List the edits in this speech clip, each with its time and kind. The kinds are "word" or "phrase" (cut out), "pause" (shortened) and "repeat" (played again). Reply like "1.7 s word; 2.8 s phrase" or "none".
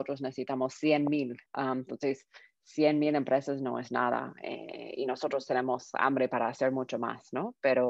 1.5 s pause